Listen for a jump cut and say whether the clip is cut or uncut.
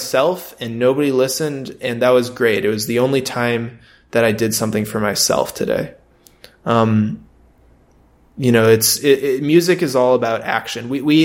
uncut